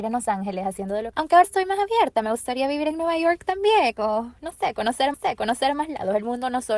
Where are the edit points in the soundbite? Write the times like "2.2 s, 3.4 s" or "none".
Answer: 1.1 s, 1.4 s, 5.1 s